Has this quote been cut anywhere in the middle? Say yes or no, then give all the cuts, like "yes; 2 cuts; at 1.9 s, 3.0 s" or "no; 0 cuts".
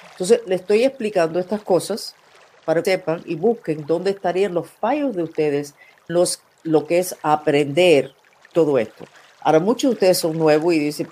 yes; 2 cuts; at 2.8 s, 6.1 s